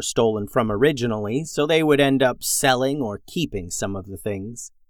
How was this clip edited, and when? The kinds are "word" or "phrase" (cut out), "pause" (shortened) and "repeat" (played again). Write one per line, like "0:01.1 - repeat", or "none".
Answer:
none